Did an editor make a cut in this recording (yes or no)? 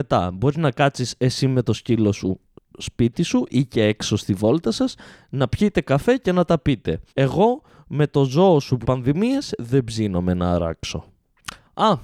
yes